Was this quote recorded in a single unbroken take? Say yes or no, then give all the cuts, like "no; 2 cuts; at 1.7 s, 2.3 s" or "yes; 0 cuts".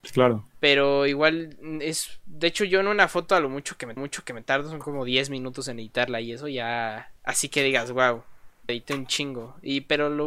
no; 3 cuts; at 4.0 s, 7.2 s, 8.7 s